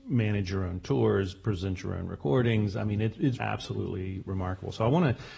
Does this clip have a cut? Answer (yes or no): yes